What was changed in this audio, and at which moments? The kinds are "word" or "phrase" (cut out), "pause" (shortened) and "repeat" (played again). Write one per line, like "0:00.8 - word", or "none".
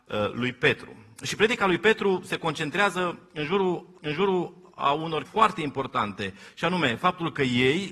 0:04.0 - repeat
0:05.3 - word